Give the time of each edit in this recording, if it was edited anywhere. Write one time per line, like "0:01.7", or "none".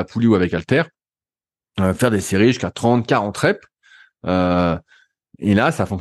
none